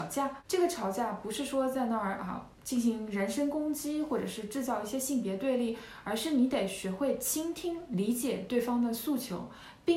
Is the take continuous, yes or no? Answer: no